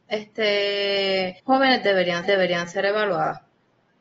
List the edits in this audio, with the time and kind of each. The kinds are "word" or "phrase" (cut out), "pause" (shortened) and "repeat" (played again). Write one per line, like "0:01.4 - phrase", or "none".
0:01.4 - pause
0:02.2 - repeat